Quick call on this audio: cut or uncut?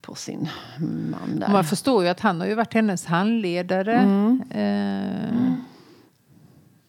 uncut